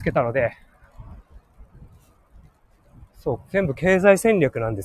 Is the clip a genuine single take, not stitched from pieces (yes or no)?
no